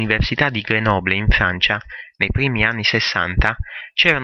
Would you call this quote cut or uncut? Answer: uncut